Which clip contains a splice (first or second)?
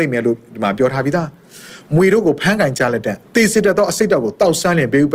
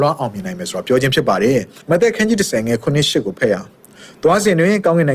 first